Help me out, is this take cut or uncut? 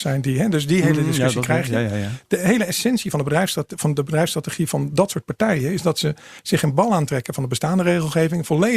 uncut